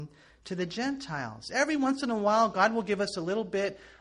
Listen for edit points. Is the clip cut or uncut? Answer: uncut